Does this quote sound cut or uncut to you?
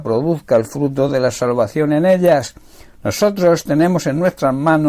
uncut